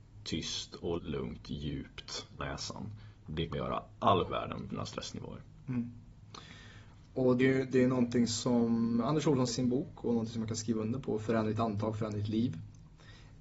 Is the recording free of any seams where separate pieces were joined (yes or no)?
no